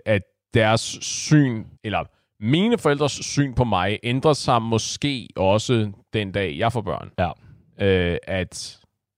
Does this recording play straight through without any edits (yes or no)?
no